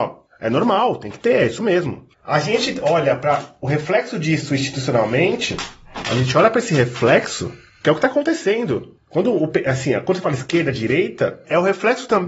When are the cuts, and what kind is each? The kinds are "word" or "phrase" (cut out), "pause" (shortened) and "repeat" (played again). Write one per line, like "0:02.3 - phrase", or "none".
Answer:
none